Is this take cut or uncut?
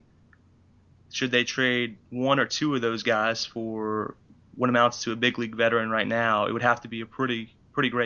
uncut